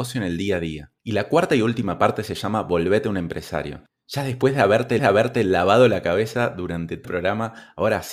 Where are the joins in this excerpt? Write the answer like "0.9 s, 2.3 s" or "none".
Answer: 1.0 s, 5.0 s, 7.0 s